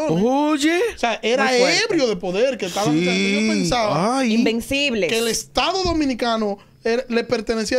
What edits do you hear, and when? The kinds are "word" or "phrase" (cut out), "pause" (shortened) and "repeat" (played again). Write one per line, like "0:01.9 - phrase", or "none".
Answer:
none